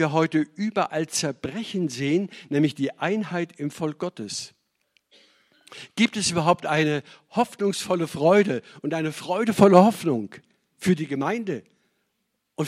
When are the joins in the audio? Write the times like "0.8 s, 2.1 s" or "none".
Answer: none